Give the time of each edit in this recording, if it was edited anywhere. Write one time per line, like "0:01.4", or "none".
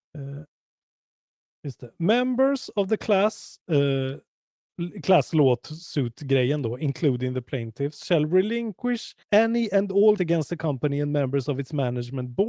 0:03.6
0:09.2
0:10.2